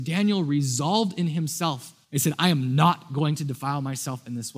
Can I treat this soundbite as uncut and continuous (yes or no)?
no